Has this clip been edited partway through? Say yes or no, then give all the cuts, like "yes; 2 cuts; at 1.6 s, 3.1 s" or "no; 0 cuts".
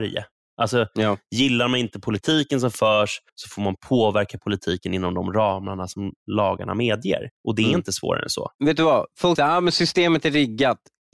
yes; 3 cuts; at 3.3 s, 7.4 s, 9.4 s